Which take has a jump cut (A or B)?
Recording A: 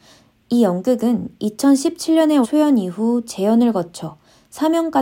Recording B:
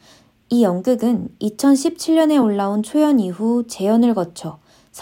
A